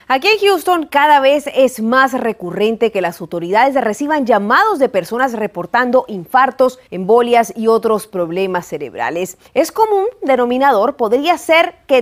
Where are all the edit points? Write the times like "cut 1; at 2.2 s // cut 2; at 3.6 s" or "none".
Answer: cut 1; at 6.9 s // cut 2; at 9.5 s